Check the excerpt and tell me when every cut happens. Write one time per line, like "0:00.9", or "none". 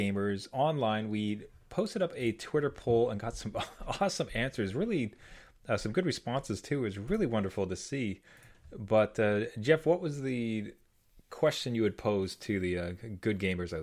none